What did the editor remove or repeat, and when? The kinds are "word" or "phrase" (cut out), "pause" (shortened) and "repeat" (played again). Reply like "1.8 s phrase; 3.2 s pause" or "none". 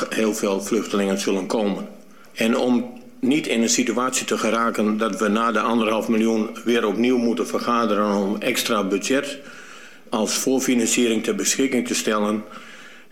none